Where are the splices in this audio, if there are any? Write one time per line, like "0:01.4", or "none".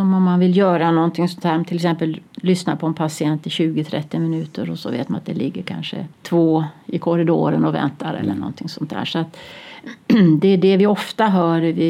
0:02.3
0:06.1